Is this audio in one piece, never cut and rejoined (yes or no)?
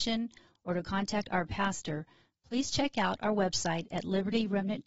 yes